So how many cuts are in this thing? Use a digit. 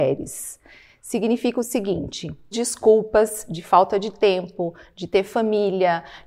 1